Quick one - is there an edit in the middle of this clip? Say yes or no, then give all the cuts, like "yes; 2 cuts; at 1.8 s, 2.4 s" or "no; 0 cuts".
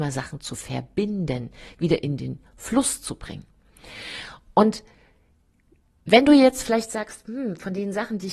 no; 0 cuts